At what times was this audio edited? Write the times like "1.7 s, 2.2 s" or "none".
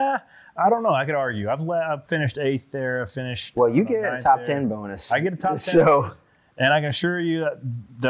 none